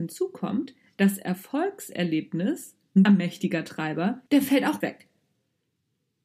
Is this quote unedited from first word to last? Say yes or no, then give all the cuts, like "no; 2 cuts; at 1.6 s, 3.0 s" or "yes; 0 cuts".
no; 3 cuts; at 3.1 s, 4.3 s, 4.8 s